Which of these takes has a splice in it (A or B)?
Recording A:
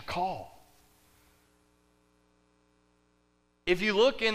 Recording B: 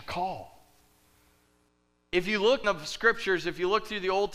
B